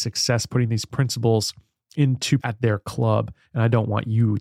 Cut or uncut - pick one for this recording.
cut